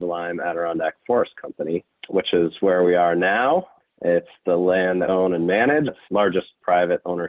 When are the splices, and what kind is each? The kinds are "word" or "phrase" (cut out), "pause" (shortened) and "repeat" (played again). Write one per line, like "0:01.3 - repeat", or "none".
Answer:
0:05.1 - word
0:05.9 - word